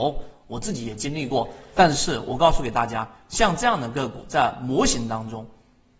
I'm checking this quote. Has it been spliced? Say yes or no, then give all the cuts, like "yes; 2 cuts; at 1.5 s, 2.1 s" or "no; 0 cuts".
no; 0 cuts